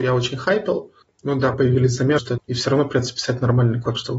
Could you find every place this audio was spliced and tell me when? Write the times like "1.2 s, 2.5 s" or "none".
1.5 s, 2.2 s

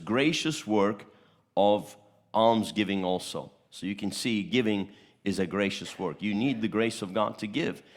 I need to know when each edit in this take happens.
none

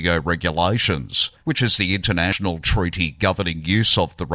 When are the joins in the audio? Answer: 1.4 s

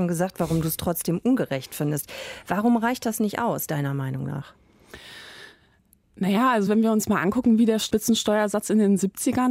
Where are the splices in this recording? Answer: none

